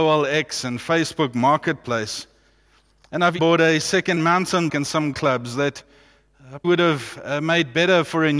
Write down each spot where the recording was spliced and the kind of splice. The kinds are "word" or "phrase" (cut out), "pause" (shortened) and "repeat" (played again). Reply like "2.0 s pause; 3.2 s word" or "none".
3.4 s word; 4.2 s word; 4.7 s word; 5.1 s word; 6.6 s word